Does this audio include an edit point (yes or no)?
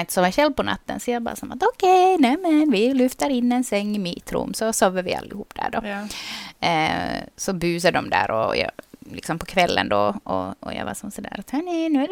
no